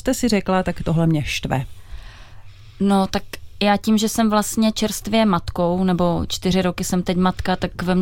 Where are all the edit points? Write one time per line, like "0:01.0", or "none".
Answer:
none